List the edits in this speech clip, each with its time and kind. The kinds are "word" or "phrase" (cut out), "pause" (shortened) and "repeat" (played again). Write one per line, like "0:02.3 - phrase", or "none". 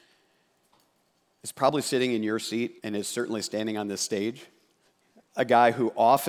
0:02.8 - pause
0:04.8 - pause